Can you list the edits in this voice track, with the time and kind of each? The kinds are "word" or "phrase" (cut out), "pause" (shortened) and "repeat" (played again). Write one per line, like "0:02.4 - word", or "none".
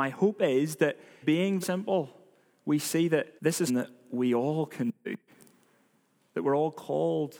0:01.2 - word
0:01.6 - word
0:03.4 - pause
0:03.7 - word